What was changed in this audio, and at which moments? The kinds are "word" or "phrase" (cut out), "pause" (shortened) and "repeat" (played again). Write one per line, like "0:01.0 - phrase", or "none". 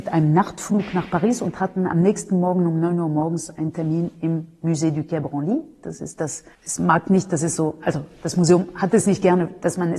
0:06.5 - pause

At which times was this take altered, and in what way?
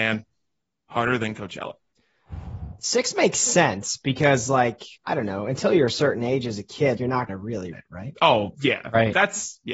0:05.0 - pause
0:07.0 - word
0:07.3 - word
0:07.7 - word

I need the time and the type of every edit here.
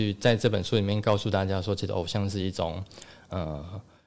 none

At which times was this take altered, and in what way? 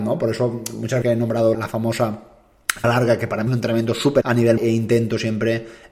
0:01.0 - word
0:01.5 - word
0:02.8 - word
0:03.5 - word
0:04.2 - word
0:04.6 - word

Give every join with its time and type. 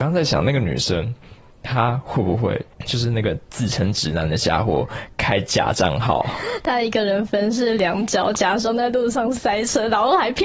0:02.7 - pause

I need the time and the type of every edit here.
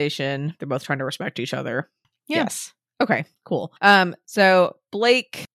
0:03.8 - pause

